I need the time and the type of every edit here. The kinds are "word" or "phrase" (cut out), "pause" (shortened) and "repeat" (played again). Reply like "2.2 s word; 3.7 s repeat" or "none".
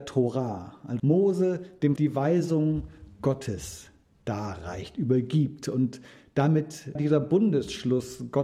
1.0 s word; 2.0 s word; 6.9 s word